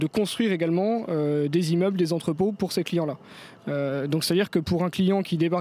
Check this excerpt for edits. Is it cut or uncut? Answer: uncut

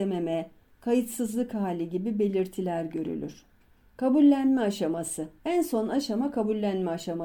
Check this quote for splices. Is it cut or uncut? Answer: cut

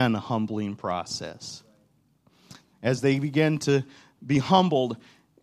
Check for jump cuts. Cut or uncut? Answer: uncut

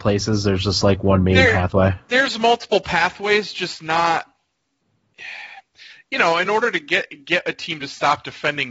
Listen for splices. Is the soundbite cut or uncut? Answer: uncut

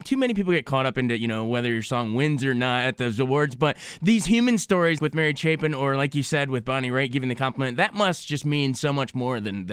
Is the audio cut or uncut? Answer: cut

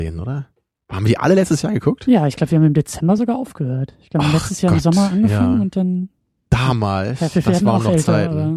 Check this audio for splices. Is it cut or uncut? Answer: uncut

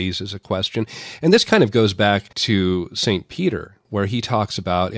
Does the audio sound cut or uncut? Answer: cut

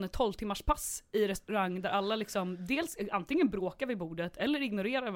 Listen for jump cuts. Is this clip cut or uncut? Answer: uncut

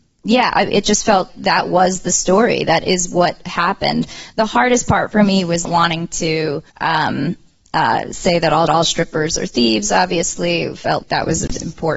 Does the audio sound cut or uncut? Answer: cut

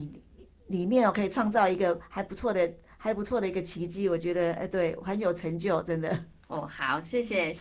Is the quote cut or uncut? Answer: uncut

